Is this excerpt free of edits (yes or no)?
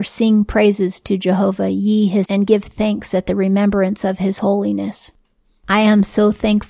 no